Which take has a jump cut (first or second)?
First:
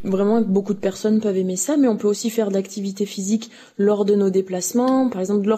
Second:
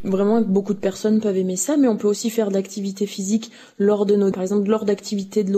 second